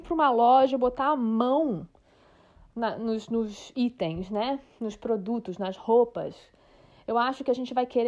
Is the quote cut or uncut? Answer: uncut